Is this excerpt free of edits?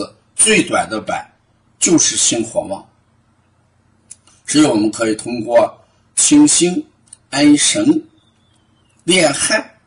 yes; 0 cuts

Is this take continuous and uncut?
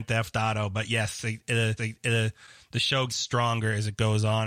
no; 2 cuts; at 1.8 s, 3.1 s

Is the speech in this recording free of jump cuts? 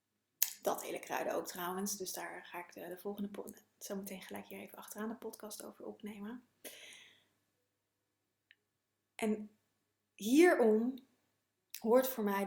yes; 0 cuts

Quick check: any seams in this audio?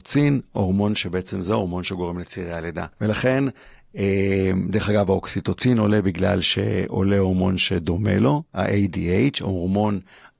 yes; 1 cut; at 2.9 s

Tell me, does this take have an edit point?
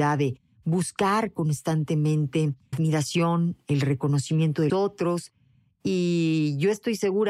yes; 2 cuts; at 2.7 s, 4.7 s

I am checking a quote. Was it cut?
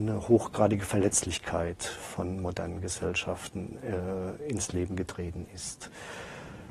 no; 0 cuts

